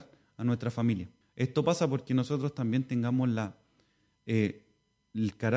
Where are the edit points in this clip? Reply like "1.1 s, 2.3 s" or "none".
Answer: 1.2 s